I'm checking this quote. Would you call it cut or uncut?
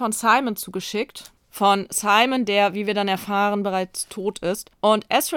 uncut